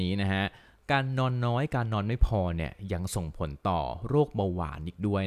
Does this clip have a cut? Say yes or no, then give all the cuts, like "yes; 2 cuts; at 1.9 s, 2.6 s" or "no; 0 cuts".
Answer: no; 0 cuts